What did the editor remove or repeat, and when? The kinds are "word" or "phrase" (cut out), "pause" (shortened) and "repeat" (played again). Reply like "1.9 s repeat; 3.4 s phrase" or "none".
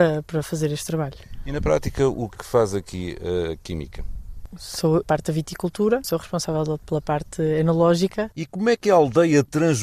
2.3 s word; 5.0 s phrase; 6.0 s word; 8.3 s pause